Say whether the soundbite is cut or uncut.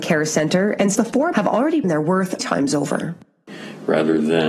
cut